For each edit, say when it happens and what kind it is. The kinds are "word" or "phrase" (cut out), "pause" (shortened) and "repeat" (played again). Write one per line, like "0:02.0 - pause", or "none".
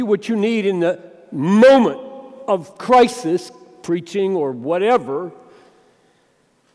none